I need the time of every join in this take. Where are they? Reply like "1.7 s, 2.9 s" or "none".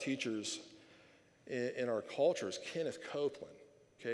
none

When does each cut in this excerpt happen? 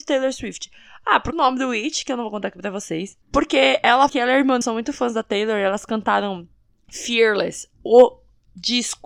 1.3 s, 3.2 s, 4.1 s, 4.6 s, 6.7 s

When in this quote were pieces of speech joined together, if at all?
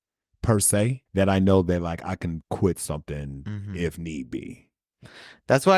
1.1 s

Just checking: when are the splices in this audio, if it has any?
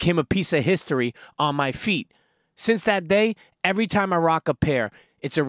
none

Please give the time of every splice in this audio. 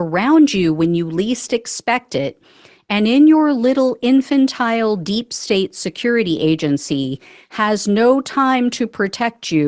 none

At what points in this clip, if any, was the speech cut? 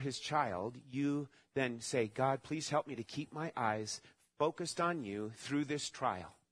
none

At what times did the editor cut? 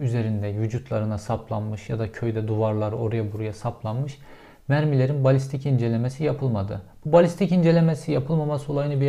none

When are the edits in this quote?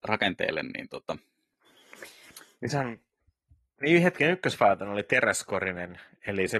none

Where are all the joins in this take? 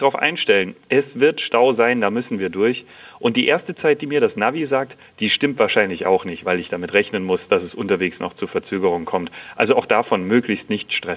none

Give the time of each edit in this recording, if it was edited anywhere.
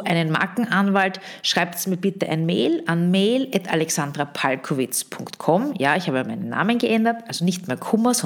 none

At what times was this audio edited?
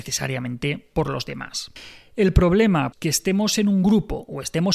2.9 s

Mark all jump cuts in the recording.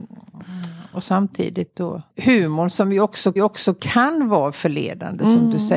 2.1 s, 3.4 s

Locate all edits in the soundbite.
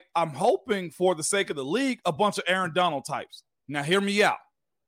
none

